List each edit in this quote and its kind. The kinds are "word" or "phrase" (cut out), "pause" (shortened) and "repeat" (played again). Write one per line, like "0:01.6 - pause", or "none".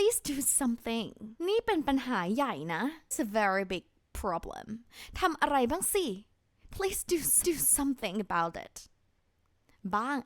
0:01.4 - pause
0:03.1 - word
0:07.4 - repeat